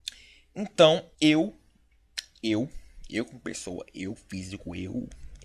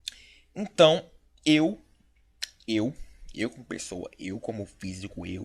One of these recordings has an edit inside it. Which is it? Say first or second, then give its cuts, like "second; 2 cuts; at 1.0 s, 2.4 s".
first; 2 cuts; at 1.1 s, 4.2 s